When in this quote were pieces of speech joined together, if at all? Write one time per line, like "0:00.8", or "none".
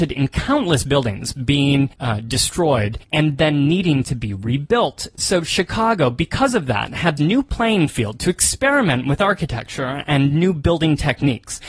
0:01.9
0:03.0
0:07.2